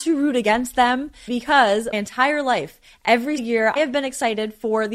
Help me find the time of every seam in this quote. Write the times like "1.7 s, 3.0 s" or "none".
1.3 s, 1.9 s, 3.4 s, 3.8 s